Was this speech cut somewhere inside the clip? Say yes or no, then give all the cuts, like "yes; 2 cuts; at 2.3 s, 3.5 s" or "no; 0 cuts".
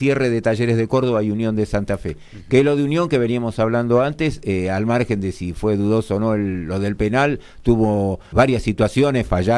yes; 1 cut; at 8.3 s